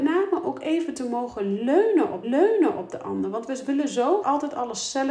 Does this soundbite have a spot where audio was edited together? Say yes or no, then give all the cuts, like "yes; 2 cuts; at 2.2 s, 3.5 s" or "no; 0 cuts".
yes; 2 cuts; at 2.2 s, 4.2 s